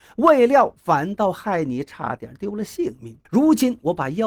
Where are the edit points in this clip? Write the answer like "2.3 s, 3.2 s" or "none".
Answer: 3.3 s